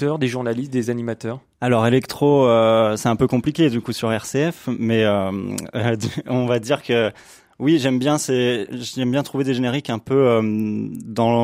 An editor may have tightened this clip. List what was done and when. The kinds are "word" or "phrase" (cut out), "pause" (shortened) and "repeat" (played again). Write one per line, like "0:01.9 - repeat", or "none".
none